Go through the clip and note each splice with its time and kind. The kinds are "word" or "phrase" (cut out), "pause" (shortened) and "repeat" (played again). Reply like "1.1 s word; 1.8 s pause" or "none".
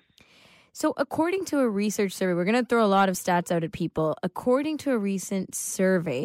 none